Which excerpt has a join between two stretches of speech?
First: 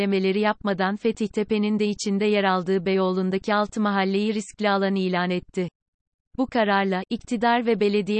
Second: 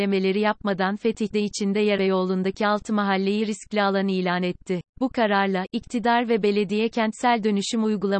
second; 3 cuts; at 1.3 s, 2.0 s, 4.9 s

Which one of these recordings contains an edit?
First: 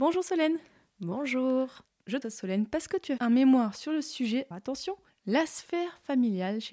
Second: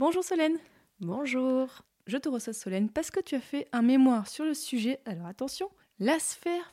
first; 3 cuts; at 2.2 s, 3.2 s, 4.5 s

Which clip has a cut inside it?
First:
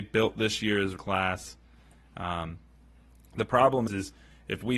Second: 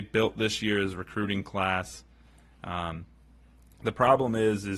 first; 2 cuts; at 1.0 s, 3.9 s

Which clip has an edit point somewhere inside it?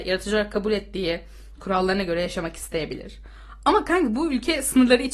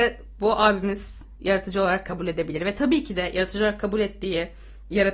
first; 1 cut; at 1.5 s

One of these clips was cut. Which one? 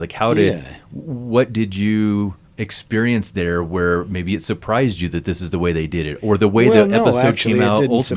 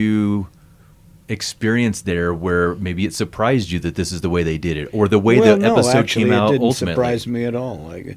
first; 1 cut; at 2.5 s

